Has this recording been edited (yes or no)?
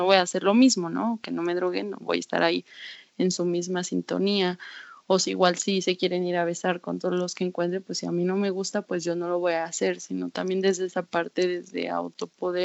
no